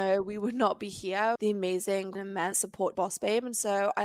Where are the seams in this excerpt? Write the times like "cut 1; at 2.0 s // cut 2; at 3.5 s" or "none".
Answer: cut 1; at 1.4 s // cut 2; at 2.1 s // cut 3; at 2.5 s // cut 4; at 2.9 s

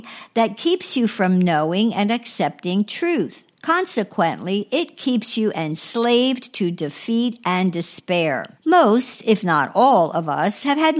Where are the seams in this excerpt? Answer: cut 1; at 3.5 s // cut 2; at 8.6 s

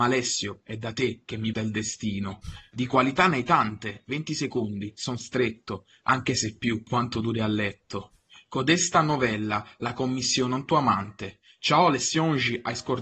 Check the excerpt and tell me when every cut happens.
cut 1; at 1.5 s // cut 2; at 6.9 s

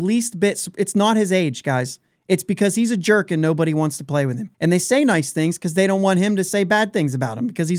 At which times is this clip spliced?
cut 1; at 4.5 s

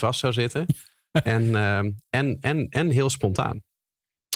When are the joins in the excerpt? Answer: none

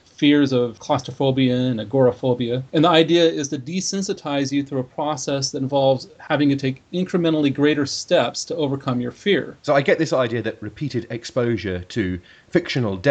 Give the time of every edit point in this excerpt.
cut 1; at 2.7 s // cut 2; at 9.6 s

